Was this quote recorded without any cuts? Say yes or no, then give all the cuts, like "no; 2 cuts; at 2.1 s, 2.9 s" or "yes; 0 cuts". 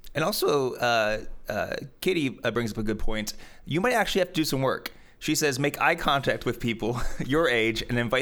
yes; 0 cuts